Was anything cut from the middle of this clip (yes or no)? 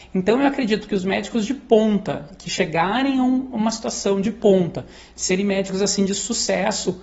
no